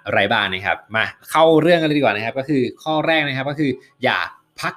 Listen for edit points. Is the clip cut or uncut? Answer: uncut